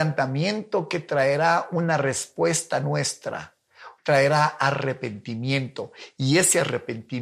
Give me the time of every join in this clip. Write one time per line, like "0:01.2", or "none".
0:04.0